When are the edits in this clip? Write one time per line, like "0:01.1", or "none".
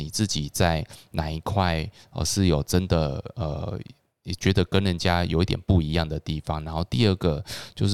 none